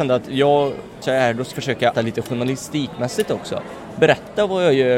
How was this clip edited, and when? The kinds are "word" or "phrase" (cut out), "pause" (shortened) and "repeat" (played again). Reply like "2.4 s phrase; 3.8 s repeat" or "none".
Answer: 1.0 s word; 1.5 s word; 1.9 s word